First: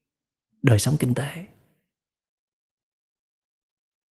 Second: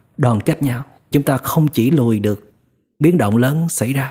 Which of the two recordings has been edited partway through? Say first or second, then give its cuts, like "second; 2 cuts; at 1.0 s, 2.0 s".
second; 3 cuts; at 1.1 s, 1.9 s, 3.0 s